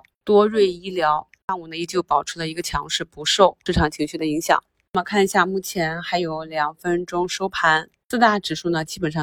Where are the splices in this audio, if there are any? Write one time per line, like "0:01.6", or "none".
none